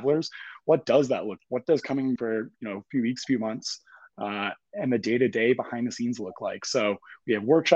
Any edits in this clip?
yes; 2 cuts; at 1.4 s, 2.2 s

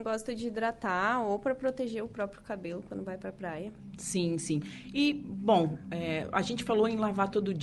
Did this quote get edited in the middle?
no; 0 cuts

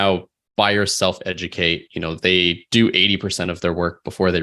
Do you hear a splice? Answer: no; 0 cuts

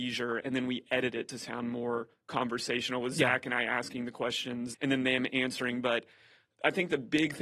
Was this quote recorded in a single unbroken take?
no; 1 cut; at 4.7 s

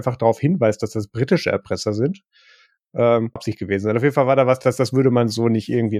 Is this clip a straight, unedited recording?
no; 1 cut; at 3.4 s

